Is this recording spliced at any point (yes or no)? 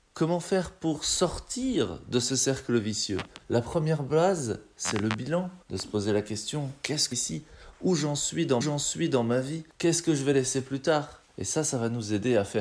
yes